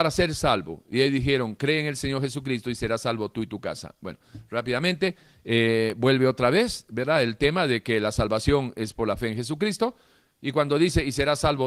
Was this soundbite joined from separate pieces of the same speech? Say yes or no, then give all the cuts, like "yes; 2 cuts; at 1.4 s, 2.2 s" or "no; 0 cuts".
no; 0 cuts